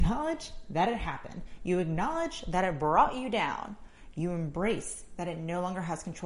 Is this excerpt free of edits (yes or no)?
yes